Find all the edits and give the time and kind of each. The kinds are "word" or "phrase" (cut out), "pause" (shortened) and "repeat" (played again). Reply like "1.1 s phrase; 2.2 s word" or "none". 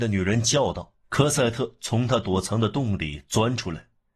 1.0 s pause